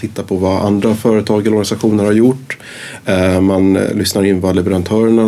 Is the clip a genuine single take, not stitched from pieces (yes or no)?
yes